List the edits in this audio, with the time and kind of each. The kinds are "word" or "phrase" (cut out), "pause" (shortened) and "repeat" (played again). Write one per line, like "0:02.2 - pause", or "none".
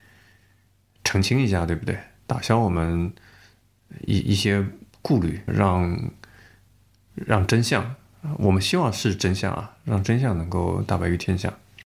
0:05.5 - word